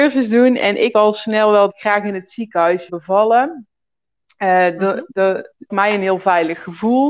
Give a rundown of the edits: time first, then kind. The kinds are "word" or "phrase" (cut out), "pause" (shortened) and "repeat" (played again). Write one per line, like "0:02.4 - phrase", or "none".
0:00.9 - word
0:01.7 - word
0:02.9 - word
0:05.7 - word